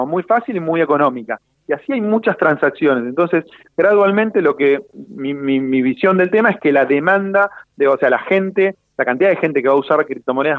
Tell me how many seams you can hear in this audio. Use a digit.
0